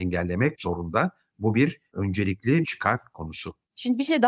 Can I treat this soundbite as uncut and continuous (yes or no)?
no